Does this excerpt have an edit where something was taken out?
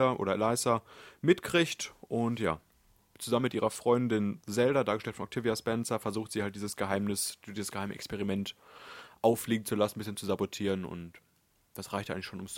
no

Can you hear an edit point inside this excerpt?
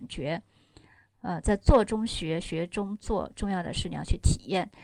no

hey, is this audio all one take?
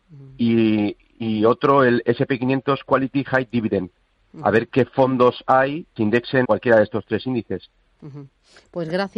no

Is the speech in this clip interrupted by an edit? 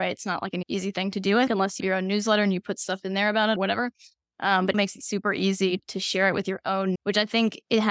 yes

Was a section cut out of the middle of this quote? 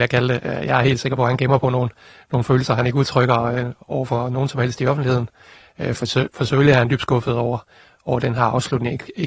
no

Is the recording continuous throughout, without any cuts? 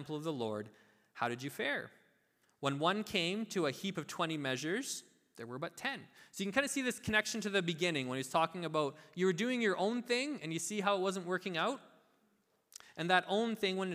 yes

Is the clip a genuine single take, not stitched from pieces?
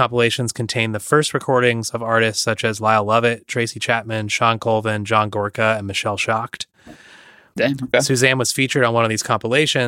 yes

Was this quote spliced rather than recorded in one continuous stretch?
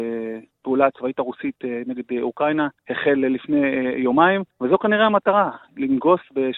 yes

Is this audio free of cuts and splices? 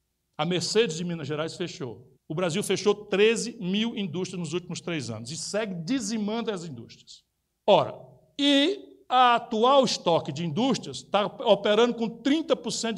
no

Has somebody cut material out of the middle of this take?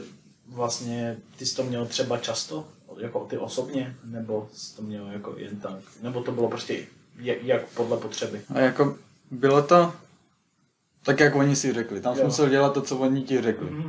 yes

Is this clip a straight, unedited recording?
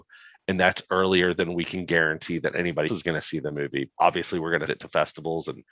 no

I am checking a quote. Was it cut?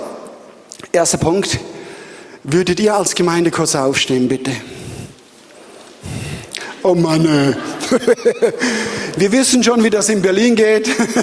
no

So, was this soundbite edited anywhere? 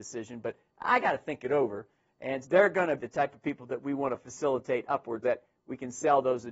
yes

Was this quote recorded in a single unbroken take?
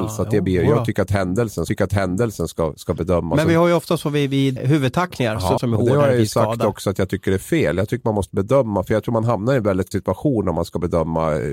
no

